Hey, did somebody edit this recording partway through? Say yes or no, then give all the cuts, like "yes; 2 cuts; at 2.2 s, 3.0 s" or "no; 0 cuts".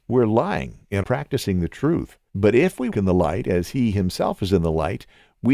yes; 3 cuts; at 1.0 s, 2.3 s, 2.9 s